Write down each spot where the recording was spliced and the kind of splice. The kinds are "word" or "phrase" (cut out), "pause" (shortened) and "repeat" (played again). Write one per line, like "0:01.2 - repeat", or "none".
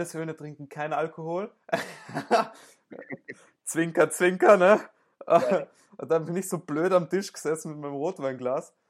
none